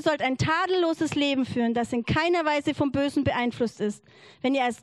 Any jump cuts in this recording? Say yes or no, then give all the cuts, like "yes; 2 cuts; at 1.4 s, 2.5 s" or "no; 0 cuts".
no; 0 cuts